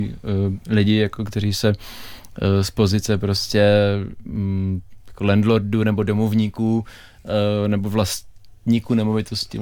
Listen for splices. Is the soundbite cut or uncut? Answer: uncut